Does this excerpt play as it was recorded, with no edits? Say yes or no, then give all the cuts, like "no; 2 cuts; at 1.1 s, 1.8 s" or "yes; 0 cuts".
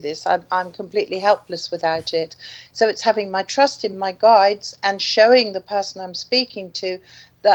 yes; 0 cuts